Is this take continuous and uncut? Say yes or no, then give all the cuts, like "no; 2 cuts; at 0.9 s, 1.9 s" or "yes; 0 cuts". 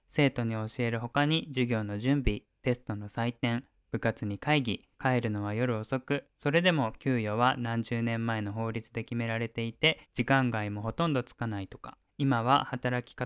no; 3 cuts; at 4.9 s, 10.0 s, 12.1 s